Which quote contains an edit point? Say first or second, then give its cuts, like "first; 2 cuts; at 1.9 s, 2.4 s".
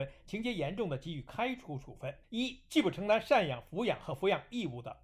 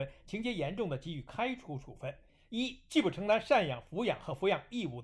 first; 1 cut; at 2.2 s